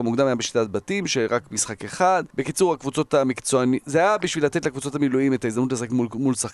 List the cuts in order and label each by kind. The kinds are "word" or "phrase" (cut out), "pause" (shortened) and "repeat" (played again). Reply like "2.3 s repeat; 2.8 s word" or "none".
2.3 s pause